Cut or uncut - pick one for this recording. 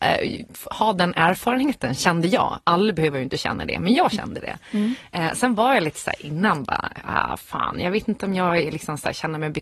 uncut